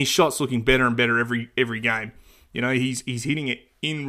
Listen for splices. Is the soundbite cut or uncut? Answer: uncut